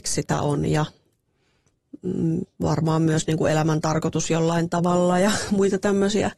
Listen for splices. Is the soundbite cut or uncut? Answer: uncut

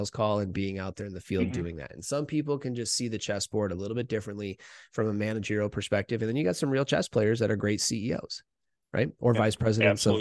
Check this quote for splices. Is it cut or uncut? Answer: uncut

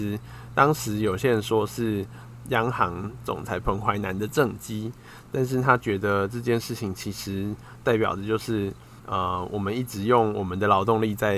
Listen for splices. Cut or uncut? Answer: cut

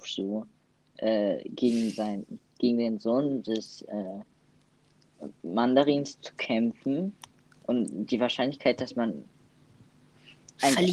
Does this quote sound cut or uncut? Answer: uncut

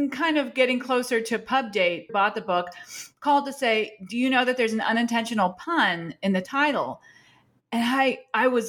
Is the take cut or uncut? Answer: cut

